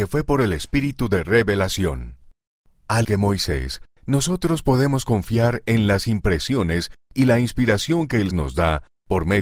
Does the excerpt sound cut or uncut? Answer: cut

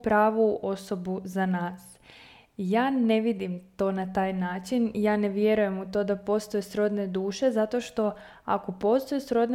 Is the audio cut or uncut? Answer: uncut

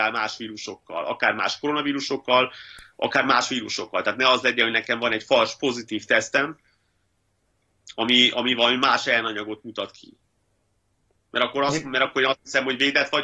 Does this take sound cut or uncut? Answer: uncut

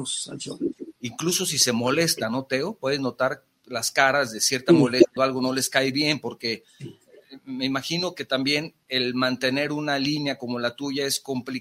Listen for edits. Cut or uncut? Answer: cut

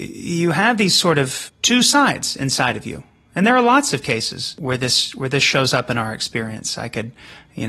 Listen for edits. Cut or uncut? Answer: uncut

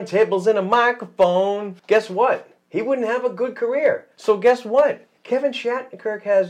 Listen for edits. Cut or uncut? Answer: cut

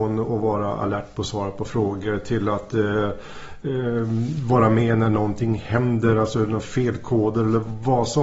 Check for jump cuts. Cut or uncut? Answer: uncut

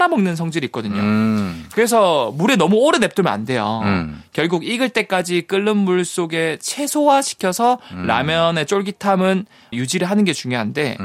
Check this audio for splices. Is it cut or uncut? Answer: cut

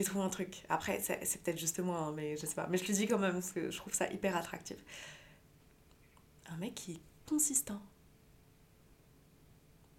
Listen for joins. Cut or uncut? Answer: cut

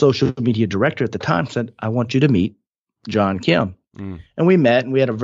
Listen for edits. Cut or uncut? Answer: uncut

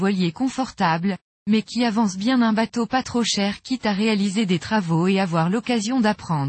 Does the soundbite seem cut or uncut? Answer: uncut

